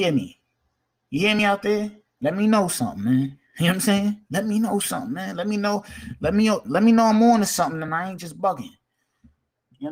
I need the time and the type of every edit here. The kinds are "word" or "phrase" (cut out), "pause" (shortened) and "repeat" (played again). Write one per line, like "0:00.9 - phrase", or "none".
none